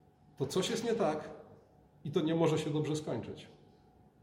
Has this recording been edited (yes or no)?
no